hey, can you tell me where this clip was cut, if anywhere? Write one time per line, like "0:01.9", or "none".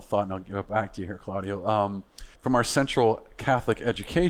0:02.4